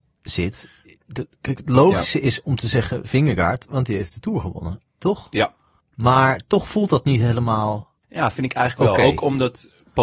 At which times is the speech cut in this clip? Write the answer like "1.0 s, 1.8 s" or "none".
5.8 s, 8.0 s